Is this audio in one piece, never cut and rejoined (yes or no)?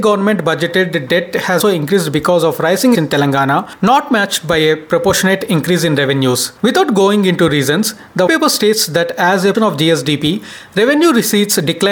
no